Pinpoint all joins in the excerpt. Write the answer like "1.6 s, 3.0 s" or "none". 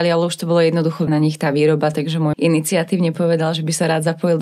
1.1 s, 1.9 s, 2.3 s